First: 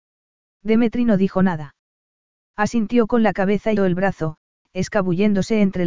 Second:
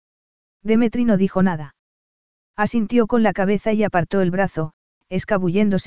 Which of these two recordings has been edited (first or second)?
first